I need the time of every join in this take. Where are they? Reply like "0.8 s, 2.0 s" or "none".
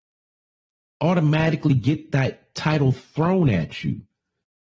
none